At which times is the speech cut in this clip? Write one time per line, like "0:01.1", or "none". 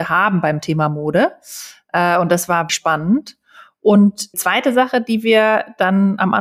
0:02.7
0:04.3